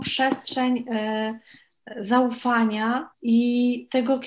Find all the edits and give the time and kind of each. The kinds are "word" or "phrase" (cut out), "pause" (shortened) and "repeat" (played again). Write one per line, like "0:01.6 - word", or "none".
0:03.1 - pause